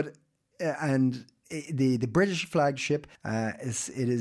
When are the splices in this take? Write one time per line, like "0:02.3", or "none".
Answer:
0:03.1